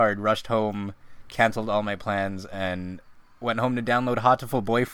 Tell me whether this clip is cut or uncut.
uncut